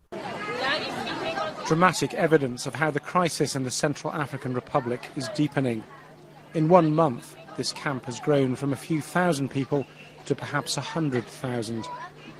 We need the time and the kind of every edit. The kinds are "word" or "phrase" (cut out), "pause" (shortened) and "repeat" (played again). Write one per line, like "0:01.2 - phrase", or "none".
none